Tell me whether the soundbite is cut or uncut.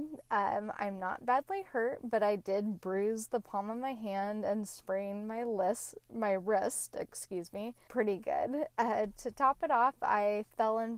cut